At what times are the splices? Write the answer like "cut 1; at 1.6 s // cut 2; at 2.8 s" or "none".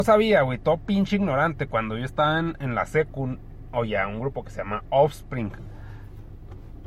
none